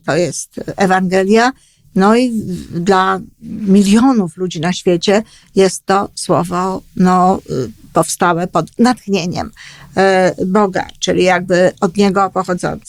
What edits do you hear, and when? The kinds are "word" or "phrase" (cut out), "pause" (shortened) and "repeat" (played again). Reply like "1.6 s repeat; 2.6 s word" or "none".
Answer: none